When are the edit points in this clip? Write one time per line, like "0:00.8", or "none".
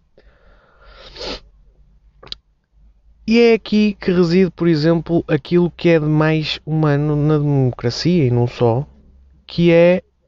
none